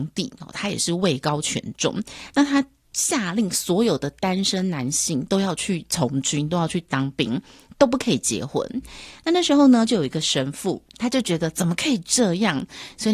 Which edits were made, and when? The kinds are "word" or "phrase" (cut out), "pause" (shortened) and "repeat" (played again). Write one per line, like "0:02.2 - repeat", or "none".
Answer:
0:10.9 - pause